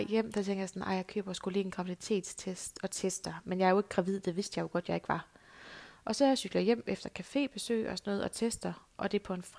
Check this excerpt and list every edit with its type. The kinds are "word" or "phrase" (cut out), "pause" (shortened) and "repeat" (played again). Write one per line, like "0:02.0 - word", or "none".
none